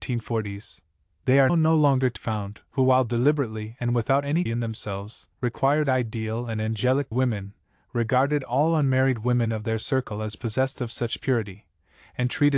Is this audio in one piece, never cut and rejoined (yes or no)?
no